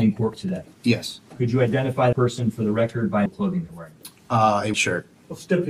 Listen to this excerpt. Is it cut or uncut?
cut